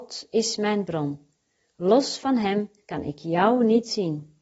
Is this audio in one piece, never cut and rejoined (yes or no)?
yes